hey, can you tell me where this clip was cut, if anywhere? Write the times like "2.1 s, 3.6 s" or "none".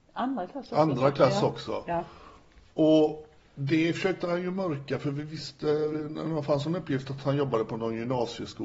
none

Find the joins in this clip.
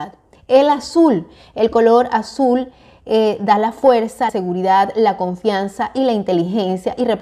4.3 s

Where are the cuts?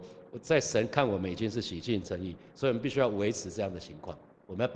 2.0 s

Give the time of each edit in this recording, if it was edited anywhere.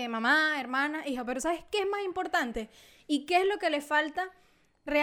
none

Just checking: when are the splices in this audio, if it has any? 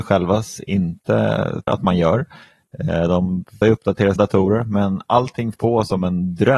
1.7 s, 3.6 s, 4.2 s, 5.5 s

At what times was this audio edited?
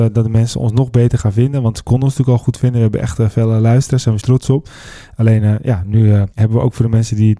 4.2 s, 6.3 s

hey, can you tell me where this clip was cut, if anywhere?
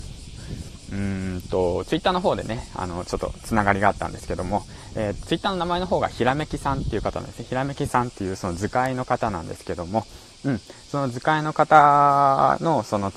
5.2 s

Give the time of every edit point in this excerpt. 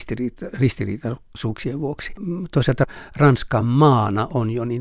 none

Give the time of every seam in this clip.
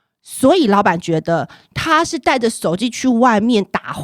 none

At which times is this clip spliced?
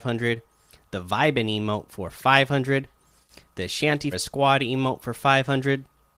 4.1 s

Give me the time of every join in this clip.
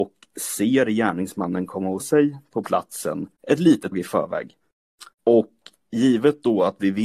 2.0 s, 3.4 s, 3.9 s, 5.1 s

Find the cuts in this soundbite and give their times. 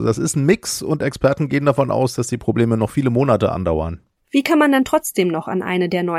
none

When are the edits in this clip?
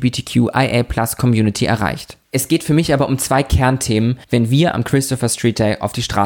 2.2 s, 4.2 s

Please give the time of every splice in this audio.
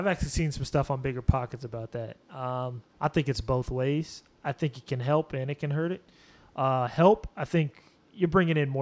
2.9 s

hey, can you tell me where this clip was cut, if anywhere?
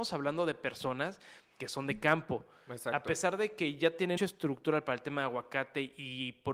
4.2 s

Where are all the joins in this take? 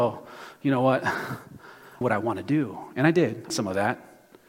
2.0 s, 3.5 s

